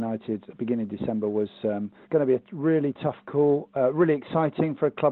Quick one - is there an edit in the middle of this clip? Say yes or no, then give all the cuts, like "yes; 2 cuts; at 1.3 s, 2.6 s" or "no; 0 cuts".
yes; 1 cut; at 2.0 s